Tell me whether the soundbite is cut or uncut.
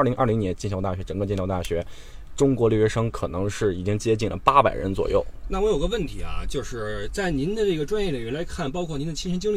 uncut